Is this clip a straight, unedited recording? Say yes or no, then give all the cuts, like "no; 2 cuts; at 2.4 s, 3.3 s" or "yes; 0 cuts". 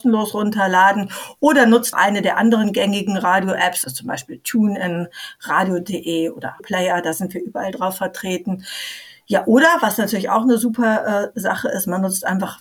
no; 3 cuts; at 1.9 s, 3.8 s, 6.6 s